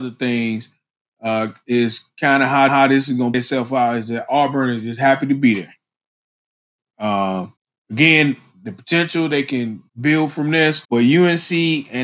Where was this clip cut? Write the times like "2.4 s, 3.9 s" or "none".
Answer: 2.7 s, 3.3 s, 7.6 s, 9.9 s, 10.8 s